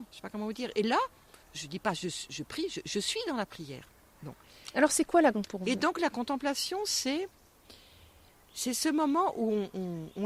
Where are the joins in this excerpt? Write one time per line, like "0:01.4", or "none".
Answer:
0:01.4
0:05.3